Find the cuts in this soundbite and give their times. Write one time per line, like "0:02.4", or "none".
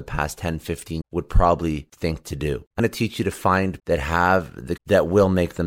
0:01.0
0:02.8
0:03.8
0:04.8